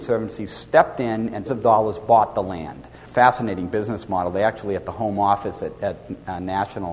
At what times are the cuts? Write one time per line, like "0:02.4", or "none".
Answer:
0:01.5